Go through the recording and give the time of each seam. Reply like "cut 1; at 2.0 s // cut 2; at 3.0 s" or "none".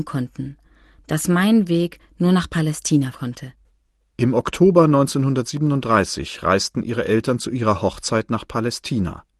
cut 1; at 3.1 s // cut 2; at 3.7 s